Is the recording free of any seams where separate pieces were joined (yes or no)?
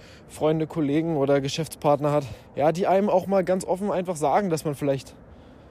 no